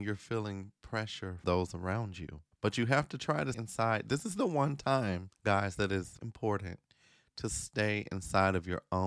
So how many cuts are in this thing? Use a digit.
5